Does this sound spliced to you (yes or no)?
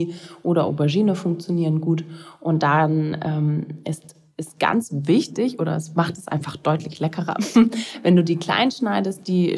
no